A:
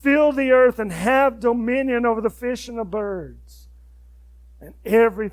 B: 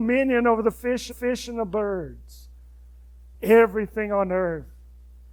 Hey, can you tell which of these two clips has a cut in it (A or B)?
B